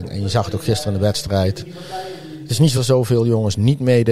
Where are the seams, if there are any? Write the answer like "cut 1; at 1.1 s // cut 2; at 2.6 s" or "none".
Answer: cut 1; at 2.8 s